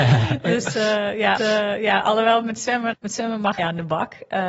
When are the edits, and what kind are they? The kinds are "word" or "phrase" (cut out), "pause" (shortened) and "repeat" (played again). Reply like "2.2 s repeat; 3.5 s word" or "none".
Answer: 1.4 s repeat; 2.9 s word; 3.6 s word